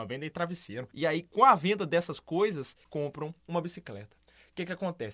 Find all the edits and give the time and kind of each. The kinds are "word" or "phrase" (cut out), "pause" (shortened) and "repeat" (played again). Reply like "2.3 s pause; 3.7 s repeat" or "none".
2.9 s word; 3.4 s pause